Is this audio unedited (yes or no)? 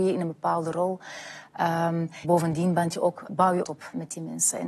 no